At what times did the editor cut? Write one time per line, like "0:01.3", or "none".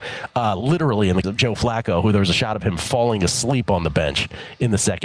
0:01.2